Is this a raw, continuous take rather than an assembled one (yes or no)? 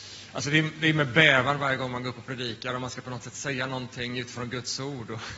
yes